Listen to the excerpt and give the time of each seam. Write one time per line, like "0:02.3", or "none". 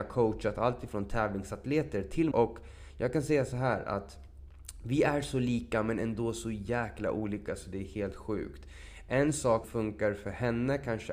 0:02.3
0:09.6